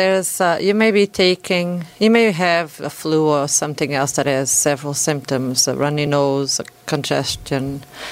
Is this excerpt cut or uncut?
uncut